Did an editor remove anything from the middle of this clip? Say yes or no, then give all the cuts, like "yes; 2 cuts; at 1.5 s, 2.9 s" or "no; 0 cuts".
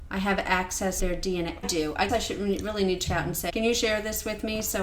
yes; 5 cuts; at 1.0 s, 1.6 s, 2.1 s, 3.1 s, 3.5 s